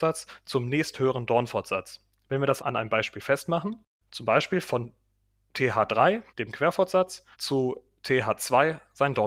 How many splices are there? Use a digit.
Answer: 4